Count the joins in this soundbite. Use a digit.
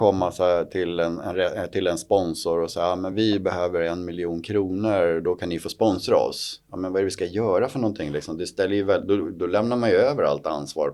0